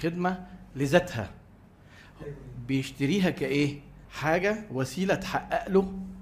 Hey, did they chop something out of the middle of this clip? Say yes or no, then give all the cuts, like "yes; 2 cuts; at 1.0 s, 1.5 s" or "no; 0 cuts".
yes; 1 cut; at 4.0 s